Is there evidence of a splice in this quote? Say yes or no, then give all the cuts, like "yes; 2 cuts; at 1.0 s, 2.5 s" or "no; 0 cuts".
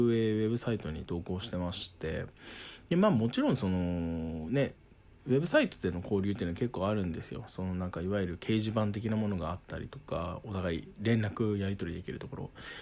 no; 0 cuts